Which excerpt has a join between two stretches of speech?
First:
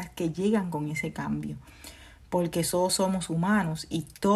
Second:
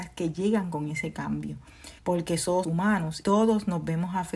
second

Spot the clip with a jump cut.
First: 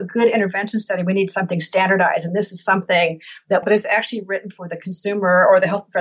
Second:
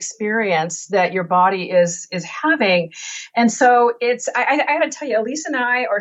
first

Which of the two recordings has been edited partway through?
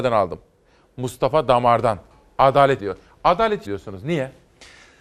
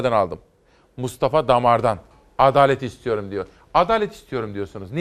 first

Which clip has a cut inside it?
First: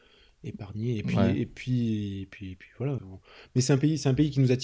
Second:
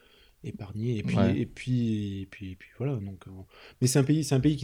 first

